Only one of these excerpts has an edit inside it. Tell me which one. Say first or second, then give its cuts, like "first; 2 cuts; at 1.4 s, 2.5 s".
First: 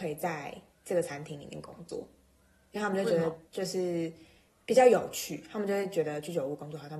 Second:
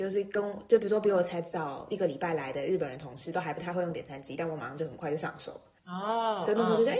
first; 1 cut; at 3.5 s